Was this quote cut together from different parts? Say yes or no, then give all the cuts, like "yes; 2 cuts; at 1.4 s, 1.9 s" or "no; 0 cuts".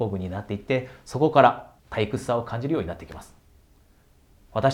yes; 1 cut; at 1.8 s